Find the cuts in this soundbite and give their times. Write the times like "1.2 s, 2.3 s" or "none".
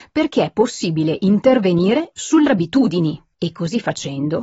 2.5 s, 3.3 s